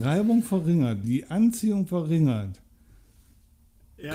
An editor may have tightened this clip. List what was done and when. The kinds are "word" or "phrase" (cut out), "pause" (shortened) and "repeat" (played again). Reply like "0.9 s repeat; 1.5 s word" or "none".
1.0 s word